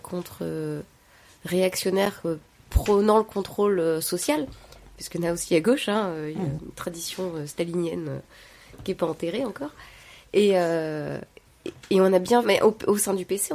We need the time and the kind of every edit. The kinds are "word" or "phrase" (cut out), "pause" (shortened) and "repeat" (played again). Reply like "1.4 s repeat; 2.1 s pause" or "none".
12.4 s phrase

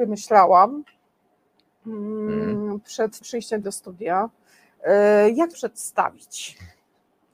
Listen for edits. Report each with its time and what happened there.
3.2 s word; 3.6 s word; 5.5 s word

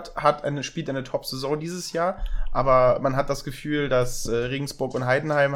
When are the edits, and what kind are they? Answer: none

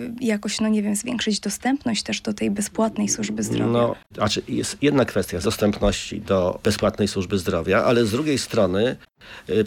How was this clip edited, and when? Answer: 4.1 s word; 5.4 s word

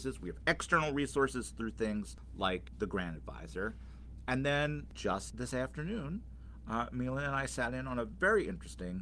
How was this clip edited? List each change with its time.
none

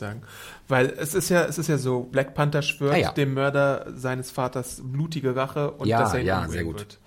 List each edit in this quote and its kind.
2.1 s word

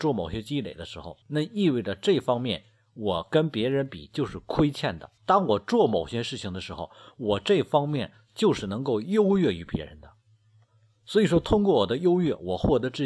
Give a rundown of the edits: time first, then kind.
1.2 s pause; 5.2 s pause

